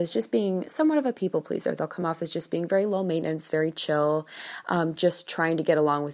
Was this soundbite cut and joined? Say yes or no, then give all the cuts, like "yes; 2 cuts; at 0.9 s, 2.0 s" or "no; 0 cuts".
no; 0 cuts